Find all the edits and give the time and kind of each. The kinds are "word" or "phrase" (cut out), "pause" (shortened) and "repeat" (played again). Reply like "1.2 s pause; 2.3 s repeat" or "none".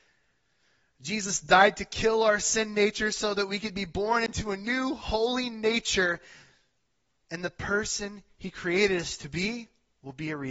none